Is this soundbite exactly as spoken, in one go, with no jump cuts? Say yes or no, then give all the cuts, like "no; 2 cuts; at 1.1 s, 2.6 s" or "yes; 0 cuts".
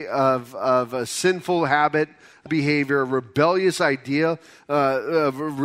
no; 1 cut; at 2.5 s